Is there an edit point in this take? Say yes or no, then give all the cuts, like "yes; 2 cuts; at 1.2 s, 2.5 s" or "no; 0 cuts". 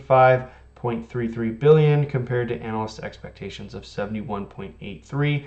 no; 0 cuts